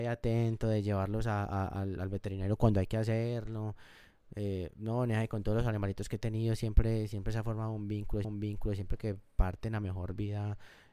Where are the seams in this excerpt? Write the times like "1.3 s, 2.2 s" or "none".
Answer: 8.2 s